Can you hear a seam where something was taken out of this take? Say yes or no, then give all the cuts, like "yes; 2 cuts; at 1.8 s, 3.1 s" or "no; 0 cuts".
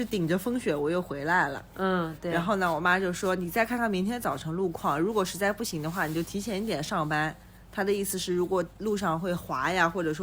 yes; 1 cut; at 7.4 s